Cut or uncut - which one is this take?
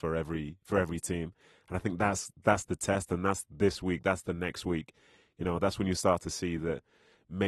uncut